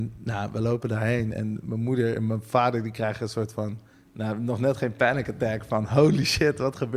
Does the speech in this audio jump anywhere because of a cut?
yes; 1 cut; at 3.9 s

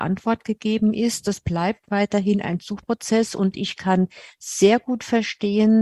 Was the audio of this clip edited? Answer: no; 0 cuts

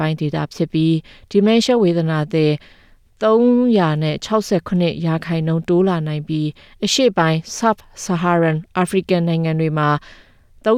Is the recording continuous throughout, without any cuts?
yes; 0 cuts

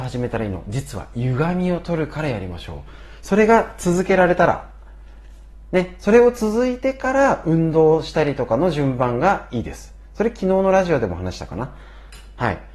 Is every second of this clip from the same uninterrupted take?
yes; 0 cuts

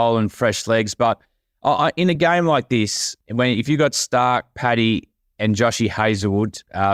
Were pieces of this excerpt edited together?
no; 0 cuts

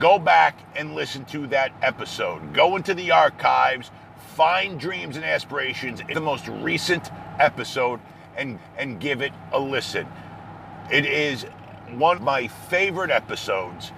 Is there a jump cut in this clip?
yes; 3 cuts; at 6.1 s, 8.6 s, 12.2 s

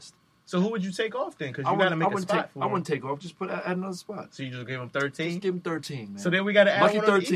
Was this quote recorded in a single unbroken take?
yes; 0 cuts

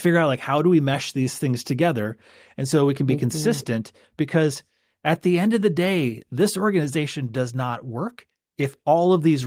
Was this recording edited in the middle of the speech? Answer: no; 0 cuts

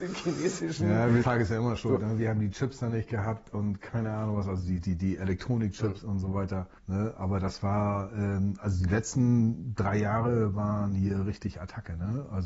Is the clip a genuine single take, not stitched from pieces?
no; 2 cuts; at 1.2 s, 6.8 s

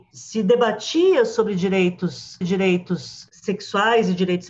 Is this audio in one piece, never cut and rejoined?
no; 1 cut; at 2.4 s

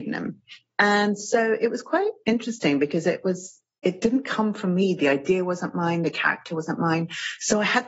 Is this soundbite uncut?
yes; 0 cuts

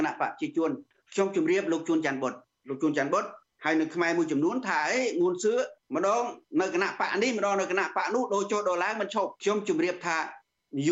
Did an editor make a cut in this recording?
no; 0 cuts

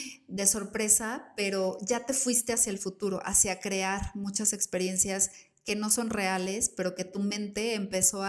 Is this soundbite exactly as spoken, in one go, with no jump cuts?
yes; 0 cuts

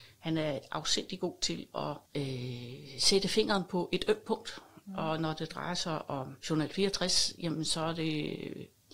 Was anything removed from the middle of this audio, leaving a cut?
yes; 2 cuts; at 2.1 s, 6.4 s

